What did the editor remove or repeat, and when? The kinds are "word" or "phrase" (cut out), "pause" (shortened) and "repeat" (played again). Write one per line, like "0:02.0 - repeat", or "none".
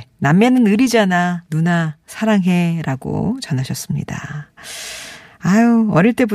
0:01.5 - pause